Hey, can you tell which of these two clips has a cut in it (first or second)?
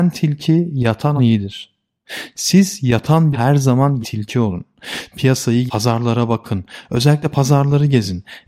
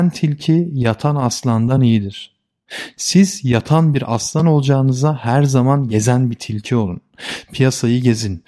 first